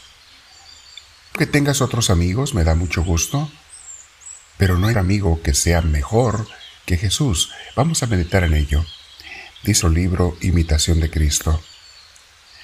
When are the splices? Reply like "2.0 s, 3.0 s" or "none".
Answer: 1.3 s, 4.9 s, 6.8 s, 9.8 s